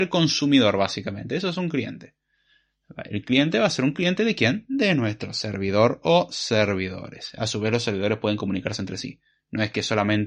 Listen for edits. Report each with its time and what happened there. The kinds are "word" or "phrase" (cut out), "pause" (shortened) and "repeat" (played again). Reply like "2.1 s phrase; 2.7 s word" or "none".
none